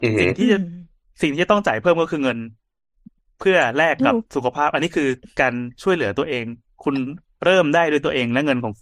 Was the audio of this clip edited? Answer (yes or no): no